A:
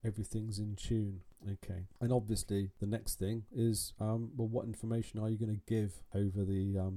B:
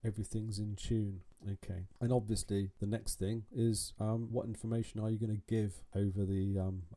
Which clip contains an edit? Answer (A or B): B